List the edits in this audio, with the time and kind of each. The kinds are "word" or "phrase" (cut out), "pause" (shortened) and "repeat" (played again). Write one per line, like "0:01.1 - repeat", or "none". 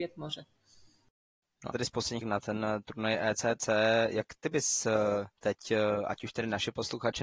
0:01.7 - phrase
0:02.2 - word
0:05.4 - word